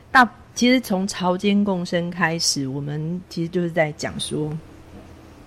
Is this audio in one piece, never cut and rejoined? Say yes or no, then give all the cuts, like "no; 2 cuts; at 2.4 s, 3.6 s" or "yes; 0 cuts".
yes; 0 cuts